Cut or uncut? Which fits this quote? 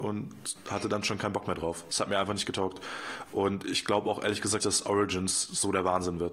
cut